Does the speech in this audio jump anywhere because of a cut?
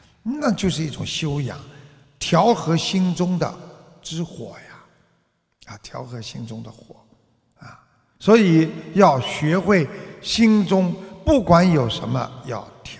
no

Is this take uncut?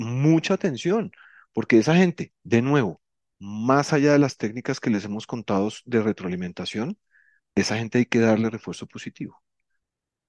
yes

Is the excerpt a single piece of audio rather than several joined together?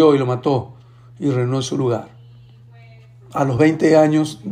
yes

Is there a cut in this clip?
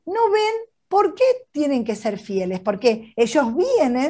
no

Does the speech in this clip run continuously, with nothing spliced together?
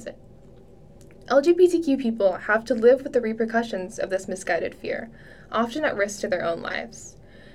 yes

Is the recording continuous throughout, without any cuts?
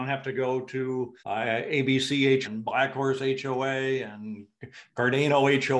no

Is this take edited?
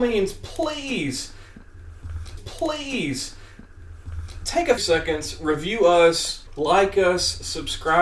yes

